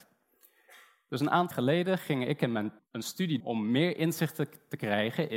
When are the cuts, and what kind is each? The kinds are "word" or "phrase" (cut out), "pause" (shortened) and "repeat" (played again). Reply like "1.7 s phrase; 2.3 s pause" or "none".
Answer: 1.5 s word; 2.8 s word; 3.4 s word